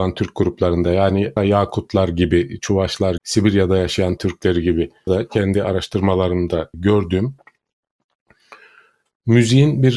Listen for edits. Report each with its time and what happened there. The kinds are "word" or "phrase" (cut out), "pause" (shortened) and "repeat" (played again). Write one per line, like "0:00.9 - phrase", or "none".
0:01.4 - word
0:03.2 - word
0:04.2 - word
0:05.1 - word
0:06.7 - word